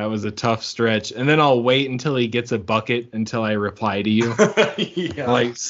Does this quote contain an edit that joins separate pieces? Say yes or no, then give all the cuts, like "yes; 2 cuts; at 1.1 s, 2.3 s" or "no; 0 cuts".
no; 0 cuts